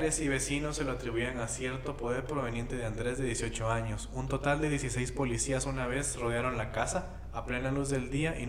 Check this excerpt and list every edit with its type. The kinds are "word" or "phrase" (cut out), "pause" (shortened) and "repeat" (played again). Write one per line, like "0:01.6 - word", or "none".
none